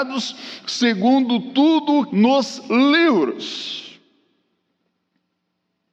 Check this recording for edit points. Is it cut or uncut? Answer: cut